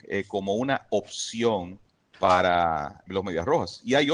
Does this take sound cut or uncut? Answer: cut